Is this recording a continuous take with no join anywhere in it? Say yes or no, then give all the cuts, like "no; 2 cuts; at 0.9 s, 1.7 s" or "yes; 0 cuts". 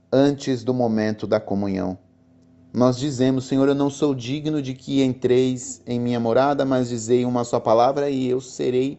yes; 0 cuts